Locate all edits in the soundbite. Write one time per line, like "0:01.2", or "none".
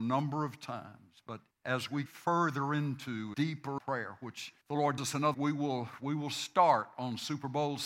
0:01.5
0:02.1
0:03.3
0:03.8
0:04.6
0:05.0
0:05.3